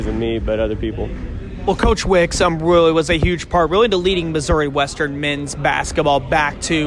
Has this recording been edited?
no; 0 cuts

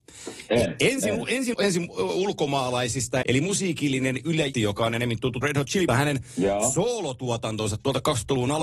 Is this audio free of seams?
no; 5 cuts; at 1.5 s, 3.2 s, 4.5 s, 5.4 s, 5.9 s

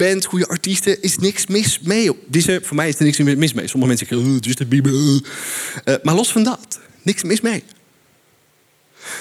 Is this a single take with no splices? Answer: yes; 0 cuts

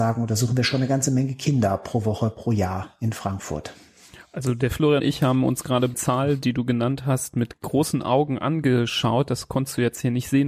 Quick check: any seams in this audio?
yes; 2 cuts; at 5.0 s, 5.9 s

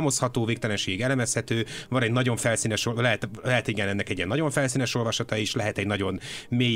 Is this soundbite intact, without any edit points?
yes; 0 cuts

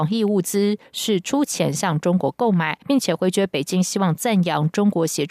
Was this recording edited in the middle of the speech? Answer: yes; 1 cut; at 2.8 s

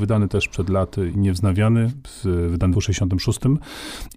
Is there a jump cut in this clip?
yes; 2 cuts; at 1.1 s, 2.7 s

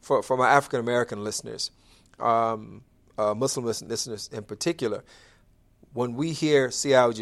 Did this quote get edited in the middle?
no; 0 cuts

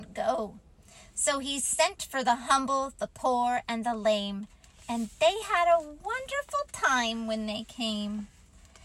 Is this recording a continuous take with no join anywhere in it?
yes; 0 cuts

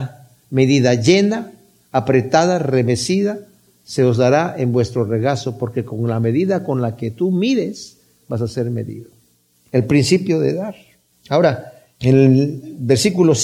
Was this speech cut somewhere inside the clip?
no; 0 cuts

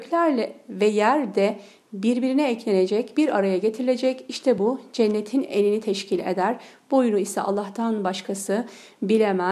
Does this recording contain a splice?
no; 0 cuts

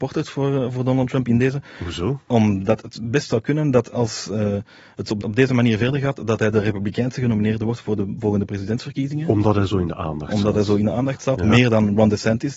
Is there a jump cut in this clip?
yes; 1 cut; at 5.2 s

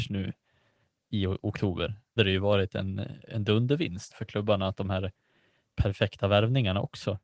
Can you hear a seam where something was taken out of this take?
yes; 3 cuts; at 2.2 s, 4.1 s, 4.7 s

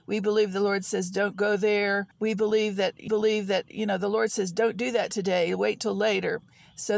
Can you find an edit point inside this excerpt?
yes; 2 cuts; at 2.1 s, 3.1 s

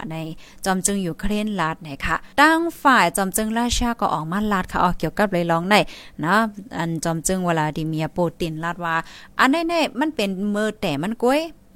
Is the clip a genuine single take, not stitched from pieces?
no; 1 cut; at 2.3 s

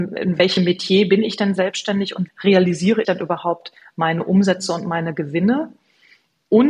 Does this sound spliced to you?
yes; 2 cuts; at 2.3 s, 3.0 s

